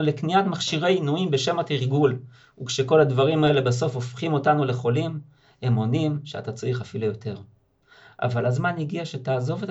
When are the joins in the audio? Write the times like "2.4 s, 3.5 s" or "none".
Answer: none